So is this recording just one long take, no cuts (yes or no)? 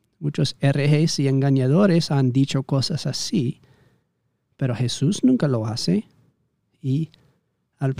yes